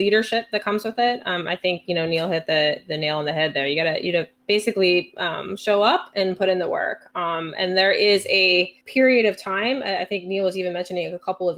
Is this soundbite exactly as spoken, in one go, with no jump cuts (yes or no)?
no